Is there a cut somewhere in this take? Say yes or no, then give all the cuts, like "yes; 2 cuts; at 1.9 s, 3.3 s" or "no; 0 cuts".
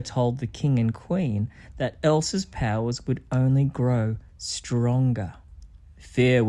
no; 0 cuts